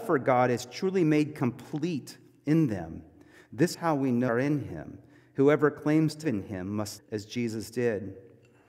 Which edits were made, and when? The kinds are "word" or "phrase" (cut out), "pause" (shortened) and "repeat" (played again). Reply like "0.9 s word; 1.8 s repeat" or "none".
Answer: 3.7 s word; 4.3 s word; 6.2 s word; 7.0 s word